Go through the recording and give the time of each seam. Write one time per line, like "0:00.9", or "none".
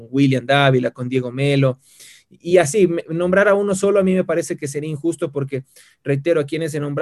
none